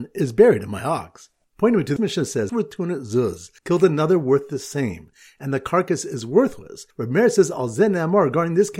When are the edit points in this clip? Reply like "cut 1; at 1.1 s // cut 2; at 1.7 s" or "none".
cut 1; at 2.0 s // cut 2; at 2.5 s // cut 3; at 3.6 s // cut 4; at 6.9 s